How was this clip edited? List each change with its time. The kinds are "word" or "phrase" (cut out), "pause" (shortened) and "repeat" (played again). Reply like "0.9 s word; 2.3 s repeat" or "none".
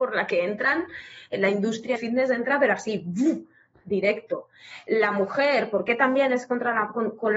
2.0 s word